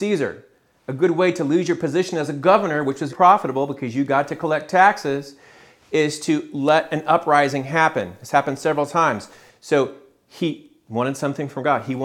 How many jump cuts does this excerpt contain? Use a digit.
1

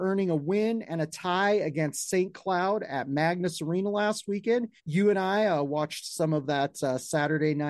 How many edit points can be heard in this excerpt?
1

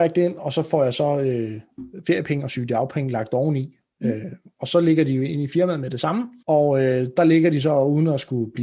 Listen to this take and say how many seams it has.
1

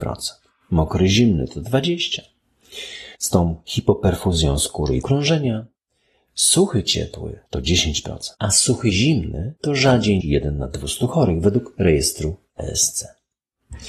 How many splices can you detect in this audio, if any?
6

